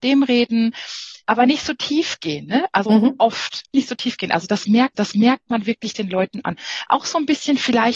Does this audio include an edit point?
yes; 4 cuts; at 1.2 s, 2.9 s, 3.7 s, 4.9 s

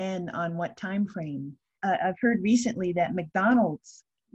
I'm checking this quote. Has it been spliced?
no; 0 cuts

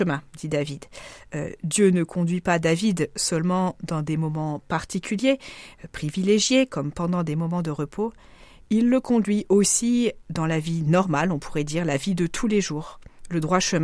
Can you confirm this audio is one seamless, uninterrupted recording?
yes; 0 cuts

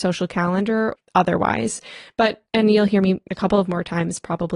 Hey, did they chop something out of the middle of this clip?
yes; 3 cuts; at 0.9 s, 2.5 s, 3.3 s

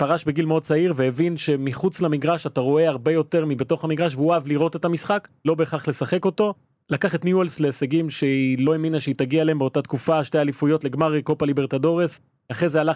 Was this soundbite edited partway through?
no; 0 cuts

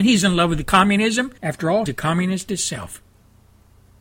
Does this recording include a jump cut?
yes; 2 cuts; at 1.4 s, 1.9 s

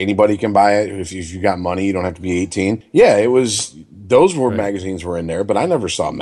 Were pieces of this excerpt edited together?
no; 0 cuts

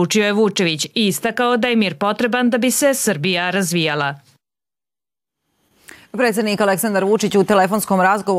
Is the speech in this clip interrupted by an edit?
no; 0 cuts

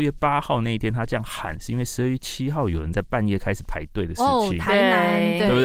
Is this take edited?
no; 0 cuts

